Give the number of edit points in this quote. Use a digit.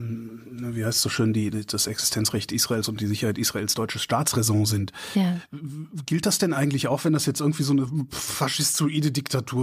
0